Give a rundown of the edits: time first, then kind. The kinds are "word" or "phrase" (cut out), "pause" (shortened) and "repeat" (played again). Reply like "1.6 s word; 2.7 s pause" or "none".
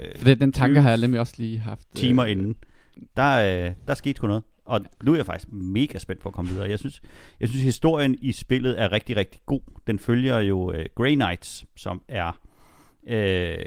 none